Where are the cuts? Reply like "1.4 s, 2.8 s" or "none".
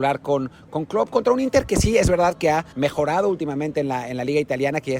2.7 s

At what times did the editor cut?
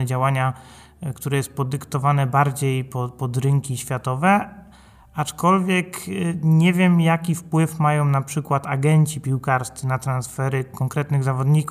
none

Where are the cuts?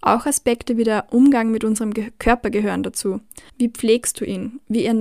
3.5 s

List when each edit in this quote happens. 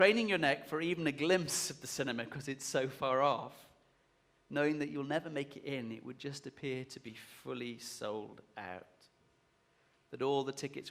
none

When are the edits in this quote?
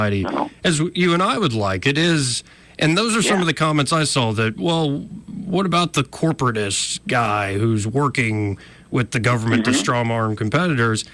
none

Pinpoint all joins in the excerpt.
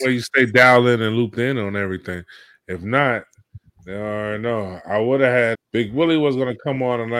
5.5 s

